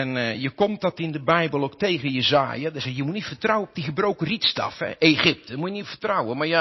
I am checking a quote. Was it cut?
no; 0 cuts

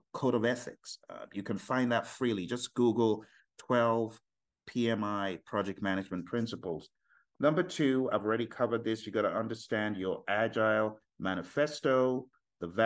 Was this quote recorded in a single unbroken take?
yes; 0 cuts

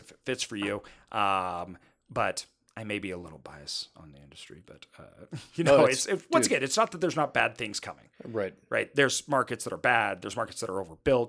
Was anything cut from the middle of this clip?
no; 0 cuts

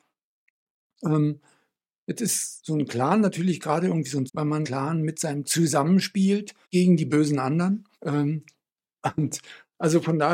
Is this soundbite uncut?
no; 5 cuts; at 4.3 s, 4.6 s, 5.4 s, 6.6 s, 7.9 s

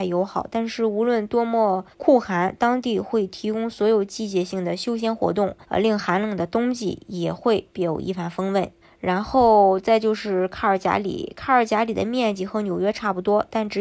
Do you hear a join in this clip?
yes; 3 cuts; at 1.9 s, 5.6 s, 8.8 s

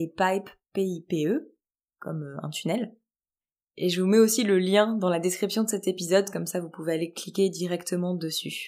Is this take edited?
no; 0 cuts

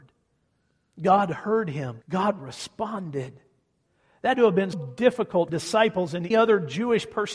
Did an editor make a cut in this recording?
yes; 5 cuts; at 2.0 s, 4.3 s, 4.7 s, 5.5 s, 6.3 s

